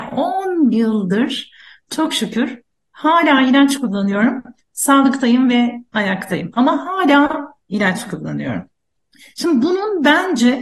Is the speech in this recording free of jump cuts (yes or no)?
yes